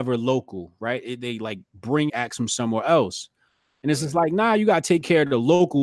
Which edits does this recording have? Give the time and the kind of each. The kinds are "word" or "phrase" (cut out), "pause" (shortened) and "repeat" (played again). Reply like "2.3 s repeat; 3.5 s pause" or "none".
2.1 s phrase